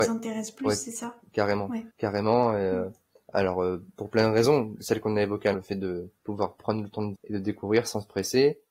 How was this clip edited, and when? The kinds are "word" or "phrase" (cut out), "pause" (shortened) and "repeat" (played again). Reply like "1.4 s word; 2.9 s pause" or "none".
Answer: 1.9 s pause; 5.5 s word; 6.2 s pause; 7.2 s word